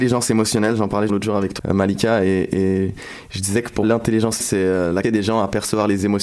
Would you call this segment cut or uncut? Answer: cut